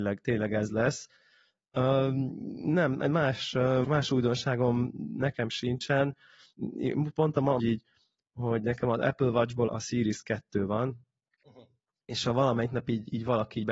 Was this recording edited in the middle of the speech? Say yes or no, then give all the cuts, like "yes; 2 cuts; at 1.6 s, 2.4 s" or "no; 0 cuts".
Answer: yes; 3 cuts; at 3.8 s, 7.6 s, 9.7 s